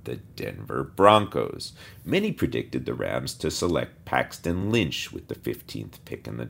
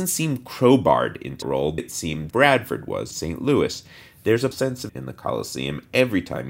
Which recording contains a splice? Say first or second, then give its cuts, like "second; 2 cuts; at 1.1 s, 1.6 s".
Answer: second; 6 cuts; at 1.4 s, 1.8 s, 2.3 s, 3.1 s, 4.5 s, 4.9 s